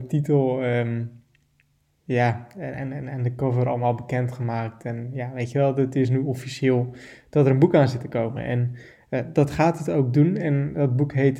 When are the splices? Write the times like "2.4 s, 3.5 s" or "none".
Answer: none